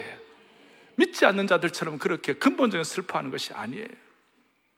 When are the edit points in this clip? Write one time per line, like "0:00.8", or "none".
none